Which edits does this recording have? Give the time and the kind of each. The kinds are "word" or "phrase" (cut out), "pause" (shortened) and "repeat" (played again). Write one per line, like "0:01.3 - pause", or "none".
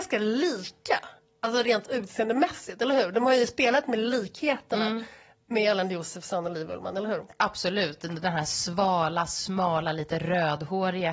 none